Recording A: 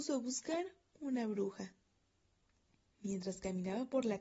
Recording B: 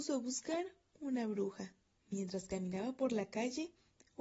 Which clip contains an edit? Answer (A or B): B